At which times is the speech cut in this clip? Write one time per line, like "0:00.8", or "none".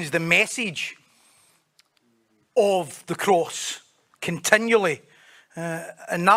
none